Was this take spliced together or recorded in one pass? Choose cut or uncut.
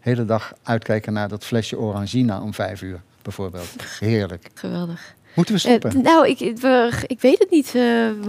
uncut